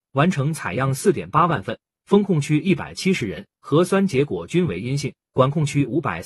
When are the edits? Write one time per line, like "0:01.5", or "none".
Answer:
0:02.0